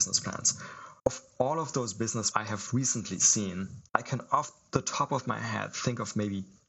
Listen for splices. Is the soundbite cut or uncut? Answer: cut